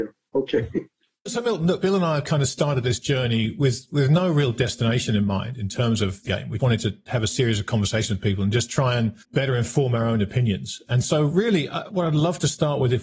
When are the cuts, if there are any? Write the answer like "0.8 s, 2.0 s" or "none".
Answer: 6.3 s, 6.6 s, 9.2 s, 11.9 s